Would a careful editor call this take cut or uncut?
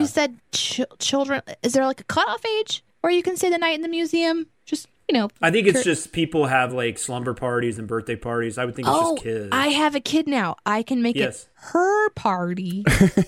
uncut